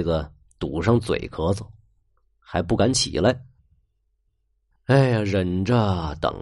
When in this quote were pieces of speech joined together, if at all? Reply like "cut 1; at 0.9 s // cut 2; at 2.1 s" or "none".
none